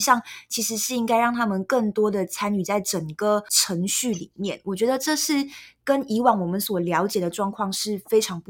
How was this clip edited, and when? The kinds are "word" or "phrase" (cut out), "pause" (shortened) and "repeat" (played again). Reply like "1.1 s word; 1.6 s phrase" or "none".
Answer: none